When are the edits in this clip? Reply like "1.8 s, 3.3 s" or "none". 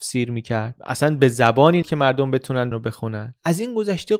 1.8 s, 2.7 s